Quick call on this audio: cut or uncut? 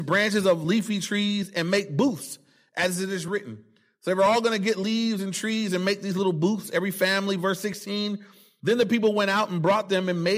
uncut